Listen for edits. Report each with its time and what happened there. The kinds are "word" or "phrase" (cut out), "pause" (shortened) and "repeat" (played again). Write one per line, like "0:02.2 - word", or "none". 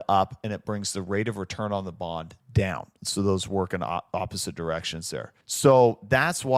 0:02.4 - pause
0:05.4 - pause